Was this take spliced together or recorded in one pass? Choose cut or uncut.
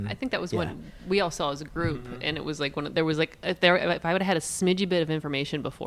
uncut